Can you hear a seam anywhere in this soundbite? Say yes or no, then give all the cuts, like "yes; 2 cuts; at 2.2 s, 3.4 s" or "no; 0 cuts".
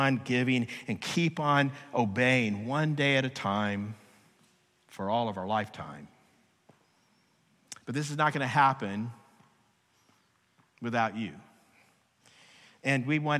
no; 0 cuts